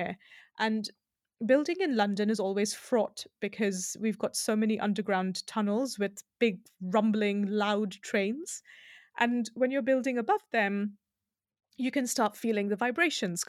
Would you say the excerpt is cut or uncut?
uncut